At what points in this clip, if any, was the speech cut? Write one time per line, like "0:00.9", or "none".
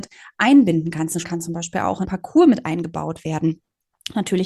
0:01.2
0:02.0